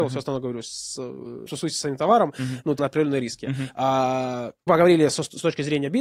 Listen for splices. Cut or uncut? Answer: cut